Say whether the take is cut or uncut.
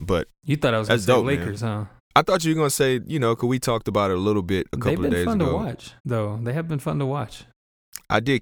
cut